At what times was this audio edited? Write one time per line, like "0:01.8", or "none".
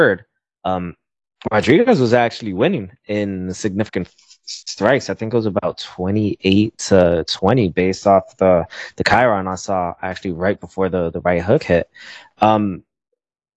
none